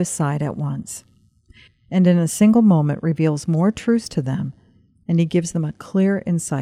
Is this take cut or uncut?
uncut